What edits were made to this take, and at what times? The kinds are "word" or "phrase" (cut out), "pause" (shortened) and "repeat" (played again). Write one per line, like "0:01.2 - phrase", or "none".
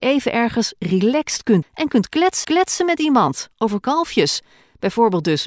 0:01.6 - word
0:02.4 - repeat
0:03.8 - phrase